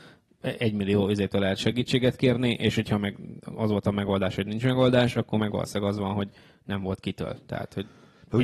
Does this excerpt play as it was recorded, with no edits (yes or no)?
yes